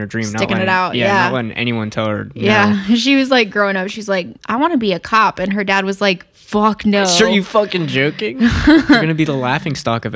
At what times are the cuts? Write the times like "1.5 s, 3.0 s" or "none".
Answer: 4.4 s